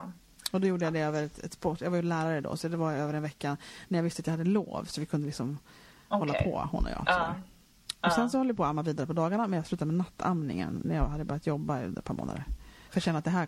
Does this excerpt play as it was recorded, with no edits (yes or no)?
yes